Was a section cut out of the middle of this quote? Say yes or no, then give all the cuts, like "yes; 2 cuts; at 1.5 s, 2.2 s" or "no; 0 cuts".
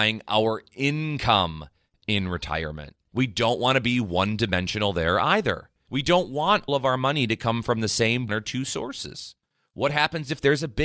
yes; 2 cuts; at 6.7 s, 8.3 s